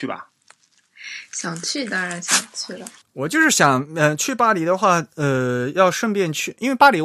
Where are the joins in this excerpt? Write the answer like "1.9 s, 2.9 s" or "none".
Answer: none